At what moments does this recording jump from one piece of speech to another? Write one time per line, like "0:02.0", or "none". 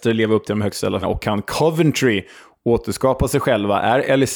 0:01.0